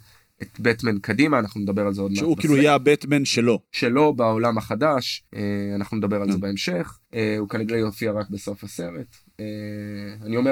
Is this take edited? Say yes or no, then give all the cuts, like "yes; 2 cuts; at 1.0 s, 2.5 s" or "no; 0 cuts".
yes; 3 cuts; at 3.6 s, 5.3 s, 7.0 s